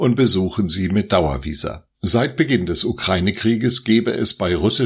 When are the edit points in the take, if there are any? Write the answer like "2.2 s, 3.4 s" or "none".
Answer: 1.9 s